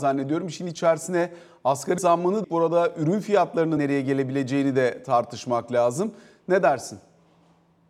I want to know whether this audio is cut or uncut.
cut